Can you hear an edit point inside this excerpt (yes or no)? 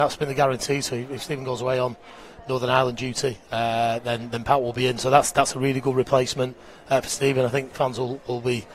no